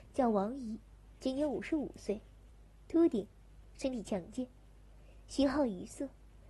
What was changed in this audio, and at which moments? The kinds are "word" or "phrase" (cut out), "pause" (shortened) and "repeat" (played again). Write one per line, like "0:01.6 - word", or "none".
none